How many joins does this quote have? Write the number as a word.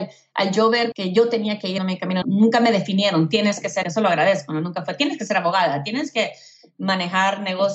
four